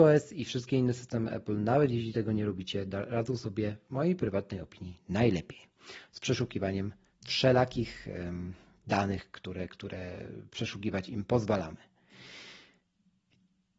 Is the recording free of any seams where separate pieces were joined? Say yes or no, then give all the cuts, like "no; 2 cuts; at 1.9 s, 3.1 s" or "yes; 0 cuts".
yes; 0 cuts